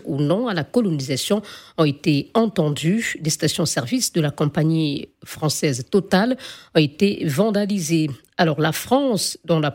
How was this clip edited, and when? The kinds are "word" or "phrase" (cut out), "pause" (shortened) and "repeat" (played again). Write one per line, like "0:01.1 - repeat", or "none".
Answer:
none